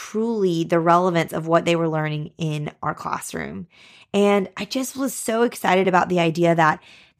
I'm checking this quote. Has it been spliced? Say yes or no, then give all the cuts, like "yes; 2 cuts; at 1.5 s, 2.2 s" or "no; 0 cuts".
no; 0 cuts